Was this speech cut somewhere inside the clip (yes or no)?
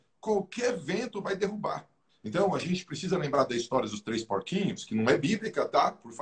yes